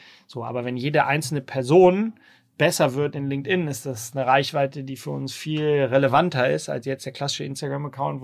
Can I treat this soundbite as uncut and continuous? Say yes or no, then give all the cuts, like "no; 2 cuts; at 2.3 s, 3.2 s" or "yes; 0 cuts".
yes; 0 cuts